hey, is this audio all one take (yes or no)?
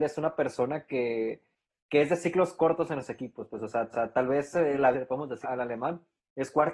no